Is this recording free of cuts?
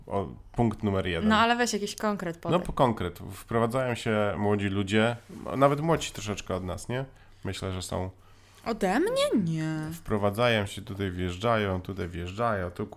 yes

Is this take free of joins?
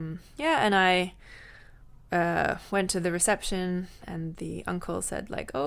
yes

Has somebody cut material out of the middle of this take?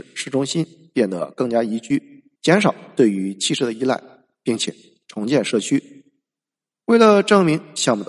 yes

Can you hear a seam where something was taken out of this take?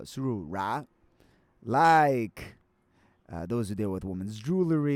no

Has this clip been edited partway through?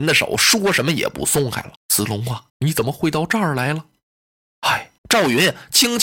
yes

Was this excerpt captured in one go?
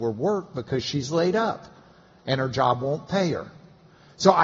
yes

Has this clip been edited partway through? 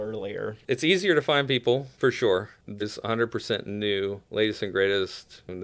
yes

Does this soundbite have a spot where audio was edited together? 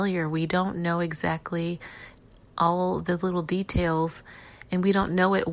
no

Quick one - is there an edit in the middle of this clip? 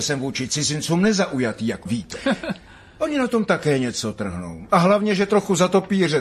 yes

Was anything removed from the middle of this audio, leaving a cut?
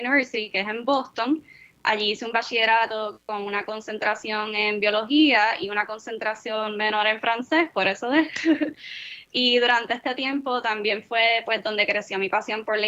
no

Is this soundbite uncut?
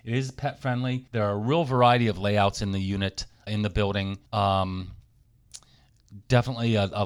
no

